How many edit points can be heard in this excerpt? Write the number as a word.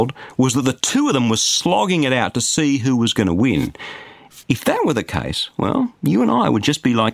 one